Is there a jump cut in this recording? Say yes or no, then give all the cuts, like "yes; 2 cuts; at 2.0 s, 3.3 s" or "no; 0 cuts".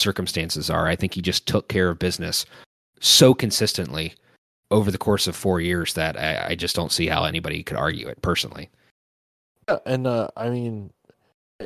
no; 0 cuts